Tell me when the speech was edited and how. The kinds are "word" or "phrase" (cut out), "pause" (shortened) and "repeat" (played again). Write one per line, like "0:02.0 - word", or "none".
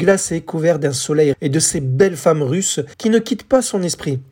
0:01.3 - word
0:02.9 - pause